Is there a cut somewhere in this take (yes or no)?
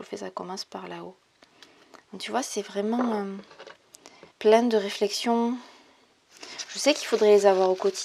yes